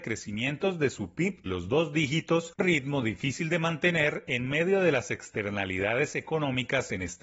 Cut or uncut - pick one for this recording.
cut